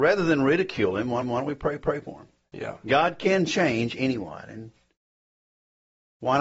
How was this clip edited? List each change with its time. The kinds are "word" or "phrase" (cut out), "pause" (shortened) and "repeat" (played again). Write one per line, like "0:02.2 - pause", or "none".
0:01.2 - repeat
0:01.8 - repeat